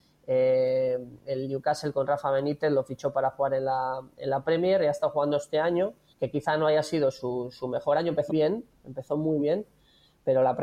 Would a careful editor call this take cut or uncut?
cut